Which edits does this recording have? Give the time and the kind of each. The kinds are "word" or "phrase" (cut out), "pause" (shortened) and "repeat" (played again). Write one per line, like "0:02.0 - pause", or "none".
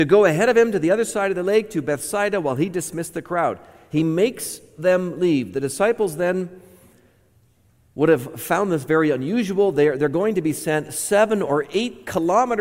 none